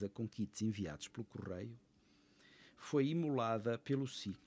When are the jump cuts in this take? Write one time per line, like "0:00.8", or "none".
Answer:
none